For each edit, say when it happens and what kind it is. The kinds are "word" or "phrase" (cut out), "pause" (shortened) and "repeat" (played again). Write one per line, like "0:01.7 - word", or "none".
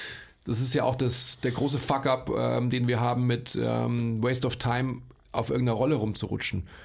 none